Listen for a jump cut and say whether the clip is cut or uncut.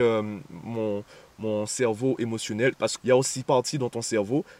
cut